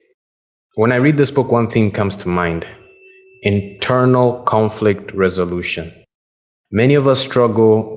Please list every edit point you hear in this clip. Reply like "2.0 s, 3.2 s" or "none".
none